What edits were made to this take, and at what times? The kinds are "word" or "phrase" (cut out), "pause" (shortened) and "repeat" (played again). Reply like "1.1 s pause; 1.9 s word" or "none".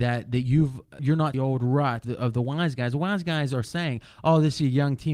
1.0 s word; 1.3 s phrase; 2.0 s word; 3.6 s word